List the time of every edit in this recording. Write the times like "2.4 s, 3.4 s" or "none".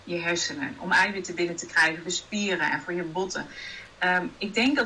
2.1 s